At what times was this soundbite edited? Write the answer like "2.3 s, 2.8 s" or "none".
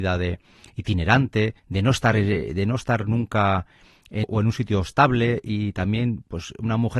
1.6 s, 4.2 s